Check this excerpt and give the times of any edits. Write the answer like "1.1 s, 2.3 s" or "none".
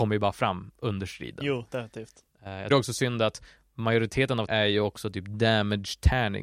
2.7 s, 4.5 s

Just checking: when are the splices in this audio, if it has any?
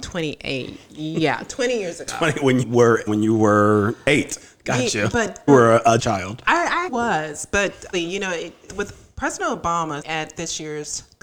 2.6 s, 3.1 s, 5.1 s, 5.5 s, 6.0 s, 6.9 s, 7.9 s, 8.7 s, 10.0 s

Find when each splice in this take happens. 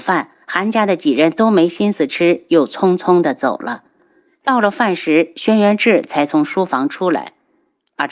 none

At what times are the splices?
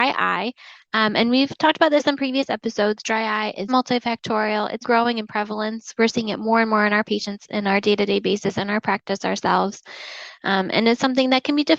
3.7 s, 4.8 s

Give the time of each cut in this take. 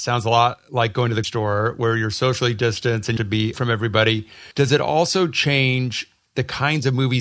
1.2 s, 3.2 s, 3.5 s, 4.5 s

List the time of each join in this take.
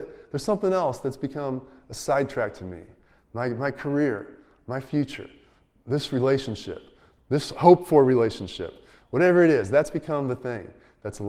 none

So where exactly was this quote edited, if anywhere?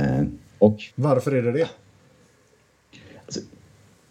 0.9 s

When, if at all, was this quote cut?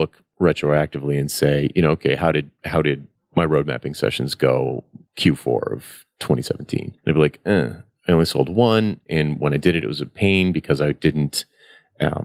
3.2 s, 5.1 s, 7.0 s

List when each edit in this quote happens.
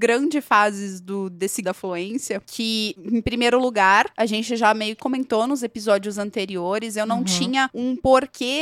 1.6 s, 5.0 s

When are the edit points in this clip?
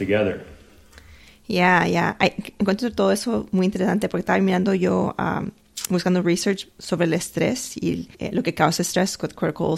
8.1 s

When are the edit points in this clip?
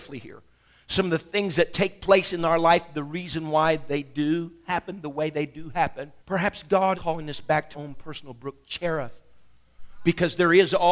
6.2 s, 6.9 s, 7.7 s

